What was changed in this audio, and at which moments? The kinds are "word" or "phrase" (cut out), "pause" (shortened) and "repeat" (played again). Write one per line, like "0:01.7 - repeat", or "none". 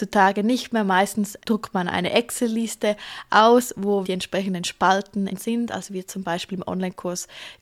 0:01.4 - pause
0:04.0 - word
0:05.3 - word